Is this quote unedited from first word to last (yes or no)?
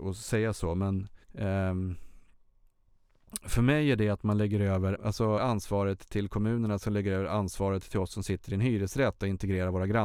no